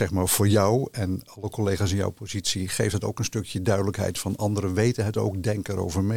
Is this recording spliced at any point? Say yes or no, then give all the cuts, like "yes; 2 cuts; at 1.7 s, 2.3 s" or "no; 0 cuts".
no; 0 cuts